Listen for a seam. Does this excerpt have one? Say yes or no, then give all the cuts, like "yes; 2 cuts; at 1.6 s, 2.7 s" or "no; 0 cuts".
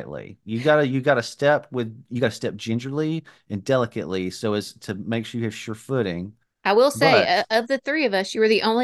no; 0 cuts